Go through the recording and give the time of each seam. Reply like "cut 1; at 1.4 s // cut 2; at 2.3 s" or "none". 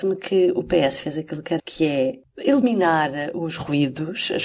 cut 1; at 1.6 s